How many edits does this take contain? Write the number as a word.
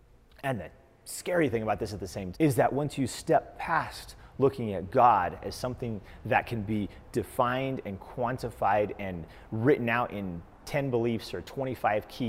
one